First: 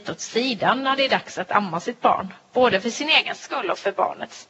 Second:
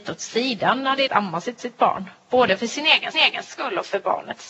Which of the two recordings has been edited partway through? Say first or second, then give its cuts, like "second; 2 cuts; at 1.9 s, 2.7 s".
second; 3 cuts; at 1.1 s, 1.6 s, 3.1 s